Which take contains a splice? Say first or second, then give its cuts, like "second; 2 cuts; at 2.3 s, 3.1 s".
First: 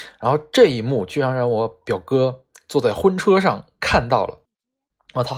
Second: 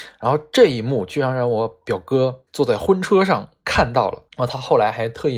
second; 2 cuts; at 2.5 s, 4.3 s